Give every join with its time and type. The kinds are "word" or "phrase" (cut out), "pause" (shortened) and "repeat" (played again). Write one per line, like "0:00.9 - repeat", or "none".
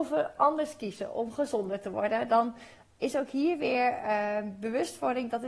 none